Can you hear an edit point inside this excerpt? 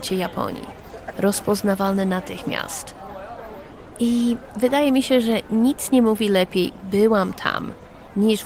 no; 0 cuts

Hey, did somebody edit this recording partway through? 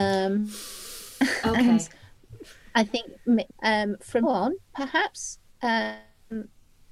yes; 3 cuts; at 3.5 s, 4.2 s, 4.6 s

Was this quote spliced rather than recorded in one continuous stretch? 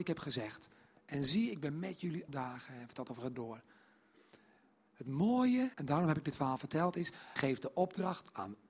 yes; 4 cuts; at 2.3 s, 3.3 s, 5.7 s, 7.4 s

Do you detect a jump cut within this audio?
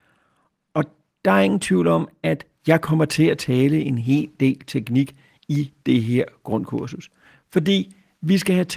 no; 0 cuts

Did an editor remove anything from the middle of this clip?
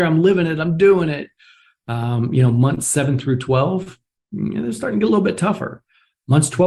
no; 0 cuts

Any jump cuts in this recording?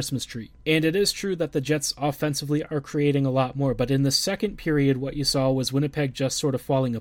no; 0 cuts

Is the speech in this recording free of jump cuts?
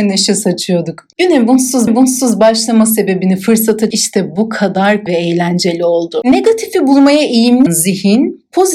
no; 4 cuts; at 1.9 s, 3.9 s, 5.1 s, 7.7 s

